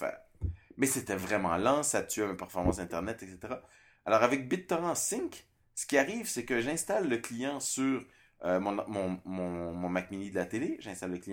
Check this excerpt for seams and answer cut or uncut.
uncut